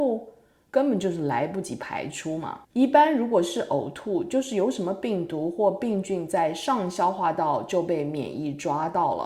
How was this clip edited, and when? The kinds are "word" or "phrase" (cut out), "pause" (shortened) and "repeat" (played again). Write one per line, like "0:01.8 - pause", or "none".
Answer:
0:02.6 - pause